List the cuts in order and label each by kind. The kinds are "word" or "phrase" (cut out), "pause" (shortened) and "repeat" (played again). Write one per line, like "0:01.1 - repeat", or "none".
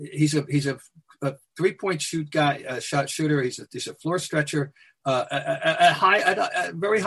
none

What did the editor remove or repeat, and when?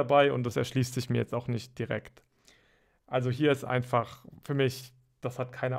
none

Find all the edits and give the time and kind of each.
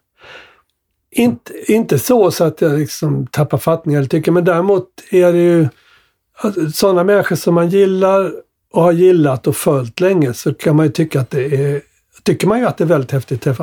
none

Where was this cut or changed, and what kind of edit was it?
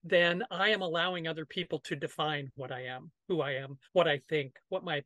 0:03.8 - pause

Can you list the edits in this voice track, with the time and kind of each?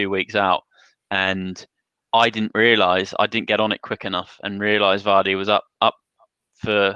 none

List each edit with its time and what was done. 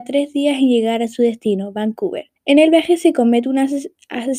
0:02.4 - pause

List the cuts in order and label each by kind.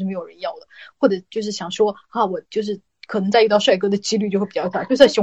0:02.9 - pause

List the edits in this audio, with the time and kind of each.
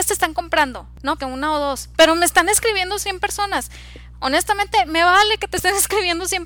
0:01.2 - word

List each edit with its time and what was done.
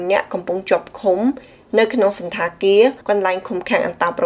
0:03.0 - pause

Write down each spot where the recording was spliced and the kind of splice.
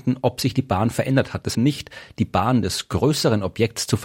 0:01.5 - phrase

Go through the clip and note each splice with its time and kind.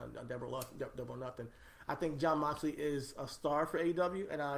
none

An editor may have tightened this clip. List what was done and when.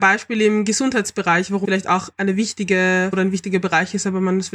0:01.6 - word
0:03.1 - word

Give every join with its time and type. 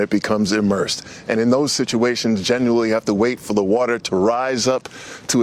none

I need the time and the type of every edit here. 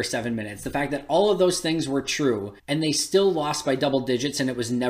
0:02.6 - pause

